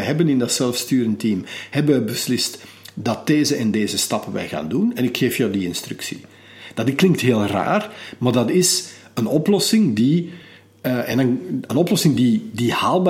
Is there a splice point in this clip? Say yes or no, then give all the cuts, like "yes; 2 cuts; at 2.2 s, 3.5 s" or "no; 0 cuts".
no; 0 cuts